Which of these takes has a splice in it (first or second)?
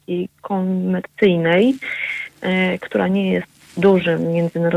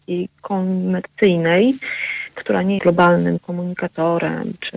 second